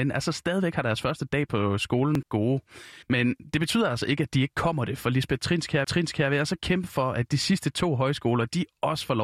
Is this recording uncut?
no; 3 cuts; at 2.2 s, 3.0 s, 5.8 s

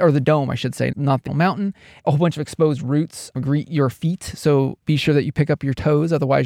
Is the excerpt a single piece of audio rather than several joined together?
no; 5 cuts; at 0.9 s, 1.3 s, 2.0 s, 3.3 s, 4.8 s

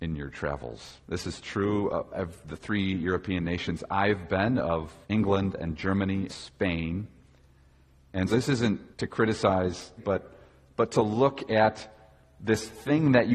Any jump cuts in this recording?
yes; 6 cuts; at 1.0 s, 5.0 s, 6.3 s, 8.3 s, 8.9 s, 10.0 s

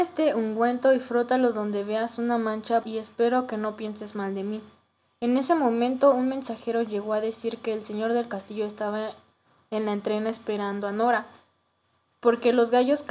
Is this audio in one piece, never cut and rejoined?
no; 1 cut; at 2.8 s

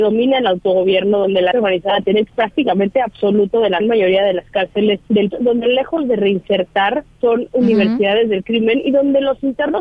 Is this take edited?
yes; 4 cuts; at 1.5 s, 2.3 s, 3.8 s, 5.3 s

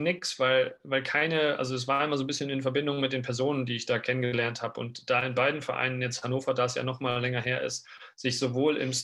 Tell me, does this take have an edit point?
no; 0 cuts

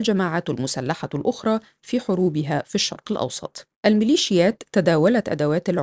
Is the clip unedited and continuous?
no; 1 cut; at 3.7 s

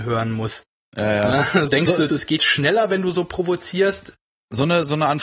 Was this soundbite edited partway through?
yes; 3 cuts; at 1.7 s, 2.1 s, 2.4 s

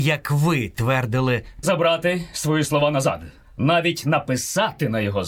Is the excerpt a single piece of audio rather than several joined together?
no; 1 cut; at 1.6 s

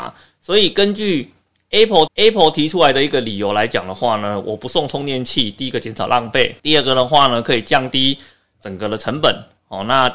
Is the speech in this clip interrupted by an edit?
yes; 2 cuts; at 2.1 s, 6.6 s

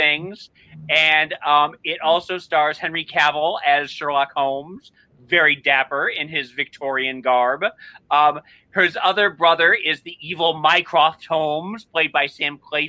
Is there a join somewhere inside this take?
no; 0 cuts

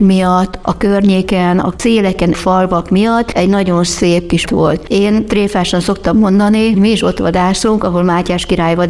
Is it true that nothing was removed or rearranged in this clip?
no; 3 cuts; at 2.3 s, 4.4 s, 6.7 s

